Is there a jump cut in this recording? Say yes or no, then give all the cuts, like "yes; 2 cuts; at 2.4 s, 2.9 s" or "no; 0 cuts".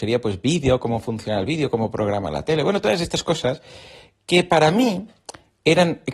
no; 0 cuts